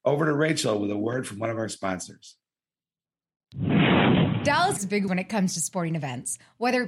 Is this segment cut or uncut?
cut